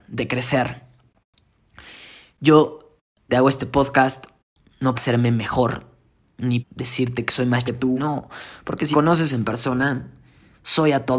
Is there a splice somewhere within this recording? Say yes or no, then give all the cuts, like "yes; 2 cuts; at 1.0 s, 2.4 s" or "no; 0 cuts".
yes; 6 cuts; at 3.3 s, 4.9 s, 6.6 s, 7.7 s, 8.0 s, 8.9 s